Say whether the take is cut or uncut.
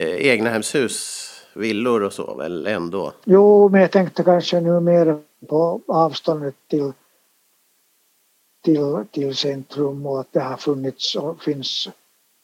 uncut